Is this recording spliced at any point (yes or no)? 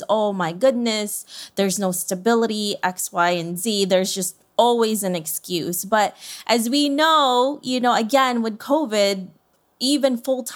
no